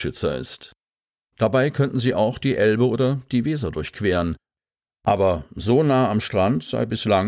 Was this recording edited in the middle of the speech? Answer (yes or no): no